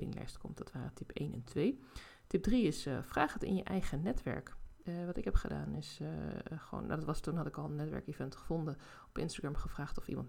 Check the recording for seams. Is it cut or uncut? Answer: uncut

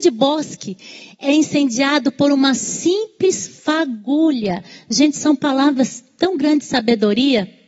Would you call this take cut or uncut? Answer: uncut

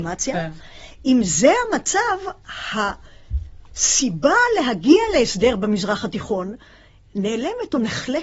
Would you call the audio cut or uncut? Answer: uncut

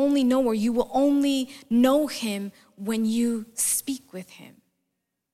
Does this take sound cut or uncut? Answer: uncut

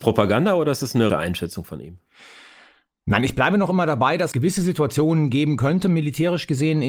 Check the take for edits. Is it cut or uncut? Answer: cut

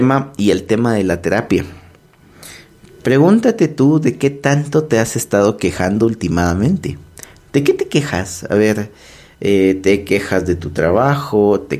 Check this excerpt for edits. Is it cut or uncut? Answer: uncut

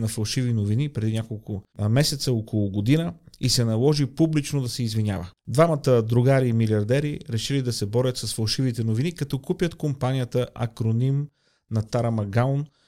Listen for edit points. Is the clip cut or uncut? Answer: cut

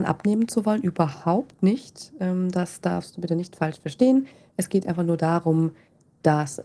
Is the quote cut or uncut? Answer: uncut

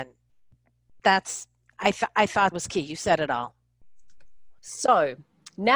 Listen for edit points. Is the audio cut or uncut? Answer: cut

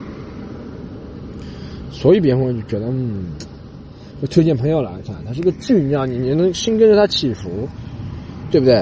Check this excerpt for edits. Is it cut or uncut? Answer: uncut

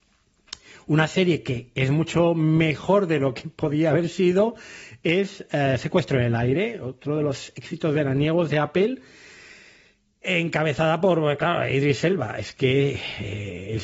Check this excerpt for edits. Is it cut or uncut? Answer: uncut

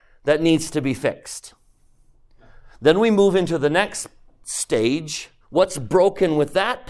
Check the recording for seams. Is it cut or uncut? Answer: cut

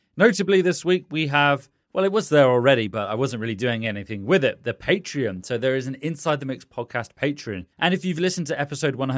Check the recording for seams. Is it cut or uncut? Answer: cut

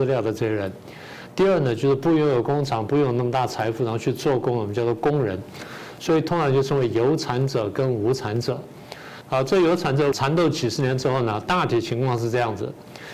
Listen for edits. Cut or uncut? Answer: cut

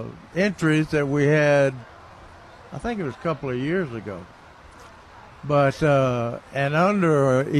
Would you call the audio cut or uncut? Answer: uncut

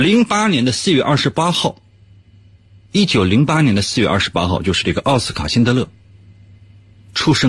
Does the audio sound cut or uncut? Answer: uncut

